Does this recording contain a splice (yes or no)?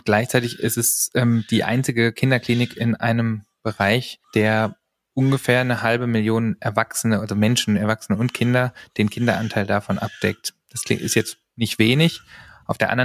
yes